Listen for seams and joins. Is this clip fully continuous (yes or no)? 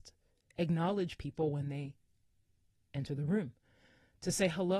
yes